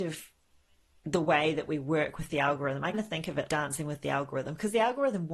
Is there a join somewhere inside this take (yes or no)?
yes